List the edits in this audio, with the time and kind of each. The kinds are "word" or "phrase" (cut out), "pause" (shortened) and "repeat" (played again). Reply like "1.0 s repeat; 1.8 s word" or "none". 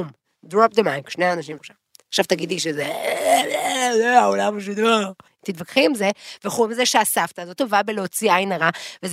1.6 s word; 5.3 s pause; 7.6 s word